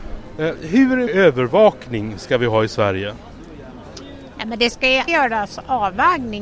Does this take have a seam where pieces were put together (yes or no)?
yes